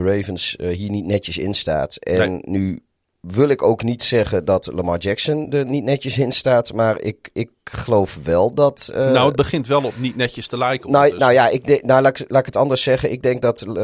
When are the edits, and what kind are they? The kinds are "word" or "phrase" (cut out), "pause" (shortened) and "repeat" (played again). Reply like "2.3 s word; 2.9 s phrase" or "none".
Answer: none